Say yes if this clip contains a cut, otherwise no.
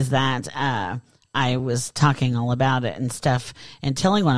no